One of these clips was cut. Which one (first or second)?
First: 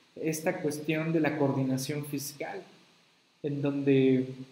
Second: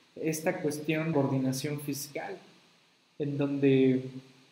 second